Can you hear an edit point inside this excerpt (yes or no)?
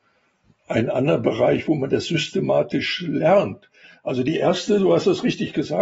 no